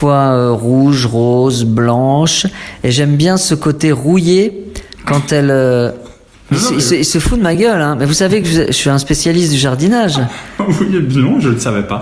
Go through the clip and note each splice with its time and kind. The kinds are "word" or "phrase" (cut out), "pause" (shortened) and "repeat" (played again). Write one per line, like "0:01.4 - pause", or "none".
none